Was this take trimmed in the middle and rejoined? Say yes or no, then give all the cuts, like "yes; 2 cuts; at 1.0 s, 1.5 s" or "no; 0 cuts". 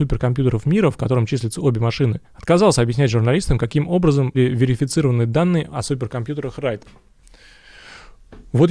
yes; 2 cuts; at 2.2 s, 4.3 s